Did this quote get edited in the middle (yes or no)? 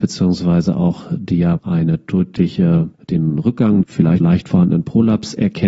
yes